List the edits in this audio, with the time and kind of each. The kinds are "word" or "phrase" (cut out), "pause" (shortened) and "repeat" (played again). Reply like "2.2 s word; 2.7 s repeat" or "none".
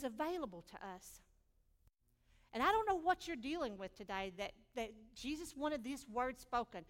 none

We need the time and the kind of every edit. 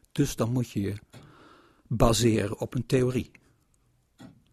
none

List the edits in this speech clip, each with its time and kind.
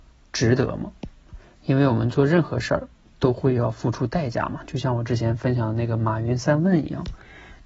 none

